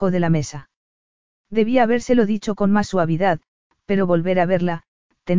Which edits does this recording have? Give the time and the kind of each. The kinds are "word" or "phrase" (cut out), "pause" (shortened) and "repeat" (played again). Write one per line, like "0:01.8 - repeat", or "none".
none